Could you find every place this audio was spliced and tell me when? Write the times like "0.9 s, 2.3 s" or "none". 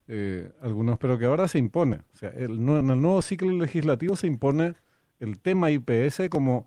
none